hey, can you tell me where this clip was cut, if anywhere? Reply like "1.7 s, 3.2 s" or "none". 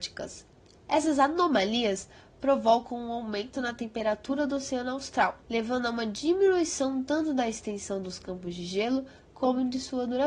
none